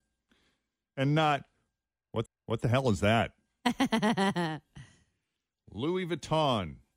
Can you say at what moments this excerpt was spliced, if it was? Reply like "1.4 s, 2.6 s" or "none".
2.3 s